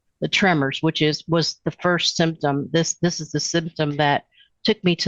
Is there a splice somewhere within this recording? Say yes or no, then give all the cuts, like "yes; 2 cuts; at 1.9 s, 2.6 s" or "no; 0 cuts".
no; 0 cuts